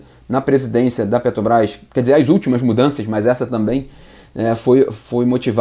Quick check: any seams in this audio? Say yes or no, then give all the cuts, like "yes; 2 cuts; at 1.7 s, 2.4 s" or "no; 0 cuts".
no; 0 cuts